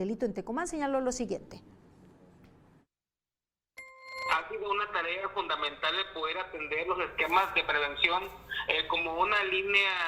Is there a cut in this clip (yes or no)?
no